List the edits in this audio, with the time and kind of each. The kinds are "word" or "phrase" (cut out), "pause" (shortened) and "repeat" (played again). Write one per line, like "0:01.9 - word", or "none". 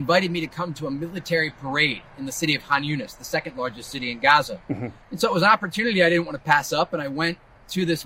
0:05.0 - pause